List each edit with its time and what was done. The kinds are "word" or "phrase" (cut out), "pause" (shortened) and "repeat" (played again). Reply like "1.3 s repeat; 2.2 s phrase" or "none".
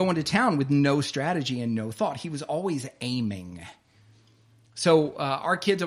none